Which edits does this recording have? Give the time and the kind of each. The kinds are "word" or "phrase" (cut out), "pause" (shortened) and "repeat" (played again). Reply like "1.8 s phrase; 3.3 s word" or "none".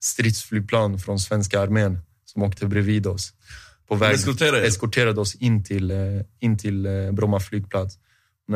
none